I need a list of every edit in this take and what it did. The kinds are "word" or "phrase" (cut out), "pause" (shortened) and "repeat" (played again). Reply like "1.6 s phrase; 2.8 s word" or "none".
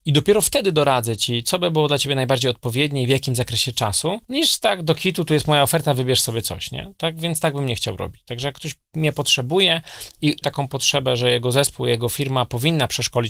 4.2 s pause; 10.4 s word